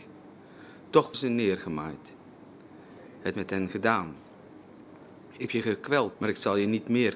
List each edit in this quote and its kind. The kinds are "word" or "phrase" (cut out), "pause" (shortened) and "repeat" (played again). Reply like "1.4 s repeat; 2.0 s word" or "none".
1.1 s word; 3.3 s word; 5.5 s word; 6.1 s word